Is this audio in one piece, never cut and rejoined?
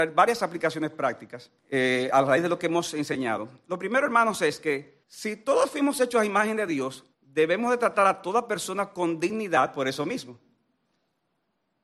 no; 3 cuts; at 1.6 s, 5.0 s, 7.1 s

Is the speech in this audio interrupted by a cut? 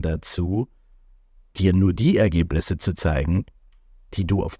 no; 0 cuts

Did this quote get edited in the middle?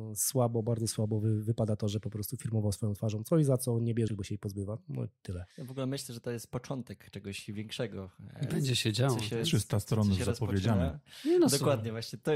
yes; 2 cuts; at 4.1 s, 5.5 s

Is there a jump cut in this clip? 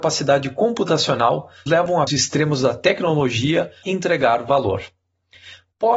yes; 3 cuts; at 1.7 s, 2.1 s, 3.8 s

